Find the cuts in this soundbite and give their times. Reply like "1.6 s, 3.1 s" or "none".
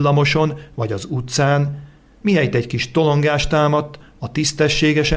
none